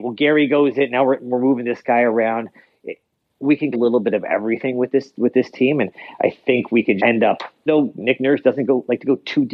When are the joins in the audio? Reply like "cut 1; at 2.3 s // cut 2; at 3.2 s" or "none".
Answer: cut 1; at 3.7 s // cut 2; at 7.0 s // cut 3; at 7.7 s